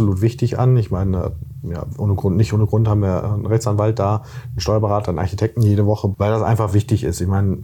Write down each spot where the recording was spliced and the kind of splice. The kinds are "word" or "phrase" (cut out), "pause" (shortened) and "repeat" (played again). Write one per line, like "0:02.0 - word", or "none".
0:06.1 - word